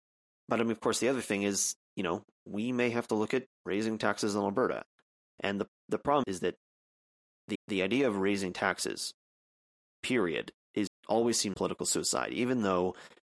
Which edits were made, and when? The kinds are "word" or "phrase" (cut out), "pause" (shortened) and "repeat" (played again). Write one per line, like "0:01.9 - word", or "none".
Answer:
0:06.2 - word
0:07.6 - repeat
0:10.9 - word
0:11.5 - word